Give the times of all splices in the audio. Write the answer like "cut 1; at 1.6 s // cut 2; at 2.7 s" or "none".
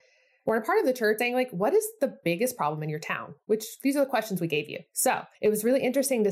cut 1; at 1.2 s // cut 2; at 5.3 s